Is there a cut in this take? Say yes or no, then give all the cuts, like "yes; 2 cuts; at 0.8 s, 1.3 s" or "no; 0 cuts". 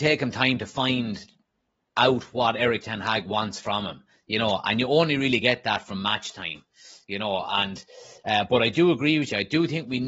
no; 0 cuts